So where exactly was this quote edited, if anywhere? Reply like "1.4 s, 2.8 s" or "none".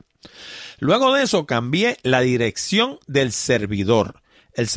none

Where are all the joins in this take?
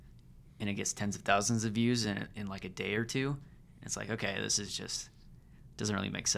none

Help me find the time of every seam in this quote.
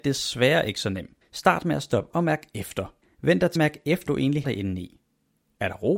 1.2 s, 2.1 s, 3.0 s, 3.6 s, 4.1 s, 4.4 s

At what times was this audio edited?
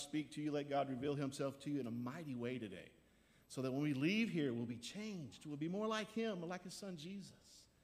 none

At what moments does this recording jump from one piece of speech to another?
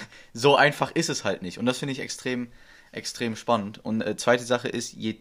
none

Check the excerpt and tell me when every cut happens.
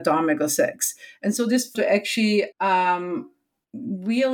1.7 s, 2.5 s

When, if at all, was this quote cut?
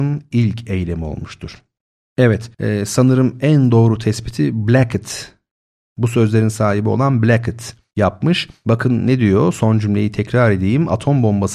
none

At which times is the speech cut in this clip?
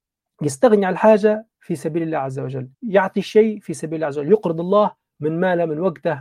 2.7 s

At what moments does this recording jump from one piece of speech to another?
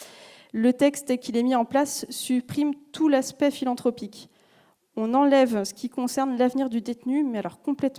none

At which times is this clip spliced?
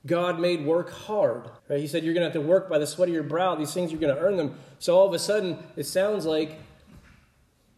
1.6 s

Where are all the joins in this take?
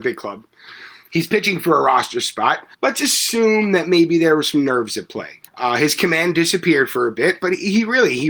2.7 s, 5.5 s

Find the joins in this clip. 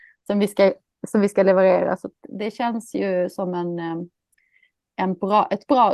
none

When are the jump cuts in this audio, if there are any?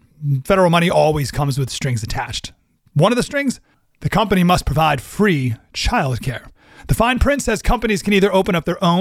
none

